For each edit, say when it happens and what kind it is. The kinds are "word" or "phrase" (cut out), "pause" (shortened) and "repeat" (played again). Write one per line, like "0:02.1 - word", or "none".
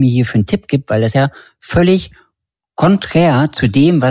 0:01.1 - word